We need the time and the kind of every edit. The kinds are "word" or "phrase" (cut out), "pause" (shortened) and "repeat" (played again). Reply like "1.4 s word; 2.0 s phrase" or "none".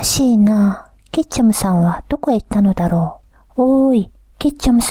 3.3 s pause